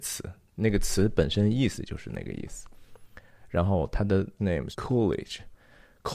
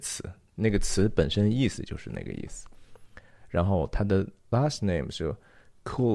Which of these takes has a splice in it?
first; 2 cuts; at 4.4 s, 4.7 s

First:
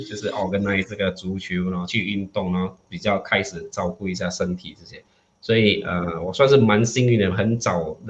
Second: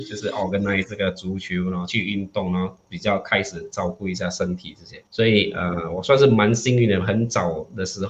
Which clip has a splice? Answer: second; 1 cut; at 5.1 s

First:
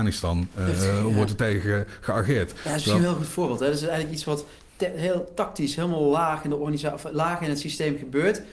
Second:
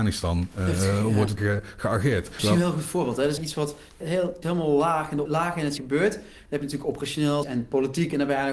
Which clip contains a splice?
second; 8 cuts; at 1.4 s, 2.4 s, 3.4 s, 4.0 s, 4.4 s, 5.3 s, 5.8 s, 7.4 s

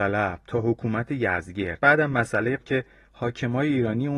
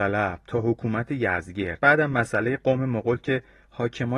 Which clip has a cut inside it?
first; 1 cut; at 2.6 s

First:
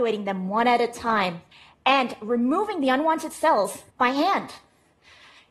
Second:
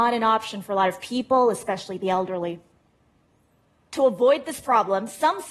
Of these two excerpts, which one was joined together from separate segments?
first; 2 cuts; at 1.5 s, 3.9 s

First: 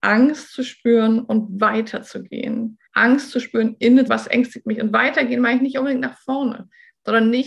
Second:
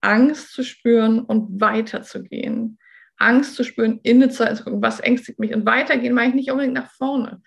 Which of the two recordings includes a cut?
first; 2 cuts; at 2.9 s, 4.1 s

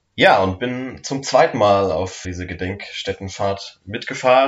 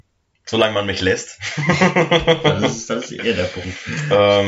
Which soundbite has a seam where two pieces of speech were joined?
first; 1 cut; at 2.2 s

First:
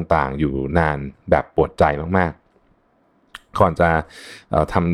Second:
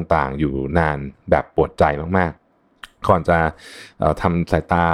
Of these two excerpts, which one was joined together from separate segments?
second; 1 cut; at 2.4 s

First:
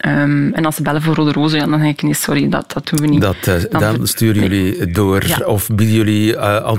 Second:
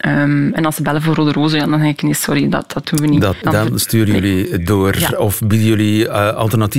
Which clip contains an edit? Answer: second; 1 cut; at 3.4 s

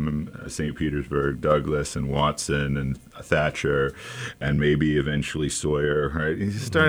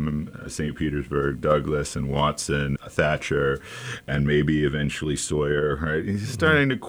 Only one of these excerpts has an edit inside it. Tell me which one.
second; 1 cut; at 2.8 s

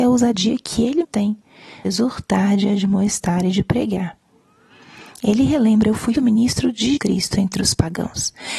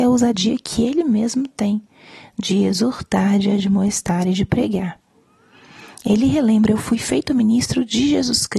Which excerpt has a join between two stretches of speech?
first; 4 cuts; at 1.0 s, 1.8 s, 6.1 s, 7.0 s

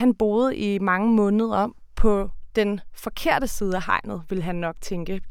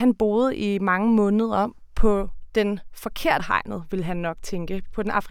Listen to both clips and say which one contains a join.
second; 1 cut; at 3.4 s

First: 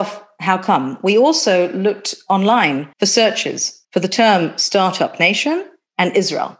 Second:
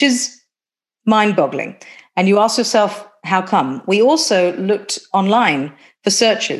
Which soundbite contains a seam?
first; 2 cuts; at 2.9 s, 3.8 s

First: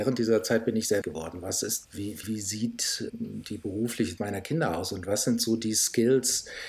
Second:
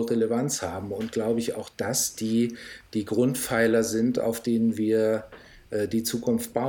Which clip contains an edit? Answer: first; 5 cuts; at 1.0 s, 1.8 s, 2.2 s, 3.1 s, 4.2 s

